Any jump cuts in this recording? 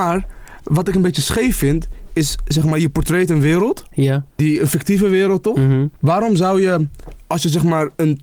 no; 0 cuts

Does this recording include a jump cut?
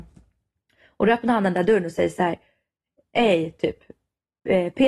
no; 0 cuts

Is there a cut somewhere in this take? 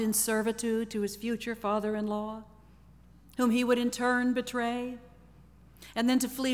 no; 0 cuts

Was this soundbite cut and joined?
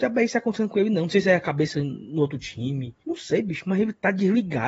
yes; 1 cut; at 3.0 s

